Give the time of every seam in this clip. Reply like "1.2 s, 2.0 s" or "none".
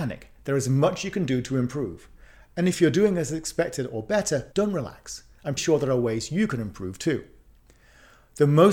4.5 s, 5.6 s